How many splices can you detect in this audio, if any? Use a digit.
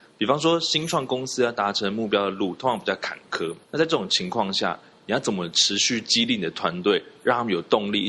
1